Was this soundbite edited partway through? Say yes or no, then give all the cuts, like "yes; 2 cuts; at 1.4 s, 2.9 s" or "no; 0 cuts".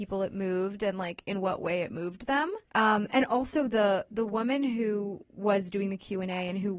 yes; 2 cuts; at 2.6 s, 5.3 s